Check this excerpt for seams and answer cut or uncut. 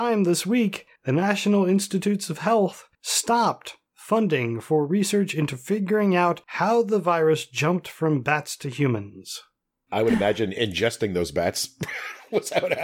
cut